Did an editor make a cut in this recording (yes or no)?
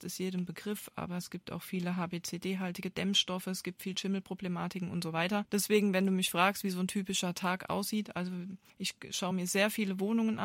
no